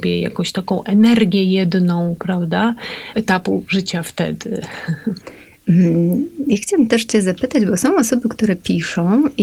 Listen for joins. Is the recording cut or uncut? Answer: cut